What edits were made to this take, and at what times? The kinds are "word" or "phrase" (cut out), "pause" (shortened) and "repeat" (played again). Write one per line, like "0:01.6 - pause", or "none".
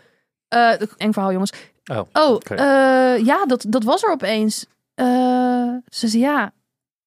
0:01.0 - word